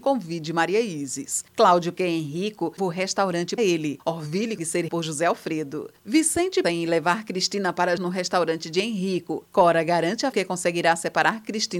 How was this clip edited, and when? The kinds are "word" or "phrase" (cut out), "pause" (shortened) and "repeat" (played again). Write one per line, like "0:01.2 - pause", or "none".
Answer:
0:01.9 - word
0:02.8 - word
0:03.6 - word
0:04.6 - word
0:04.9 - word
0:06.6 - word
0:08.0 - word
0:10.3 - word